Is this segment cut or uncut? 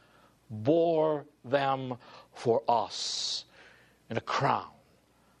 uncut